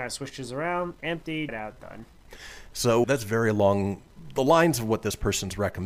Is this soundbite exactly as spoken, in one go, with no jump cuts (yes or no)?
no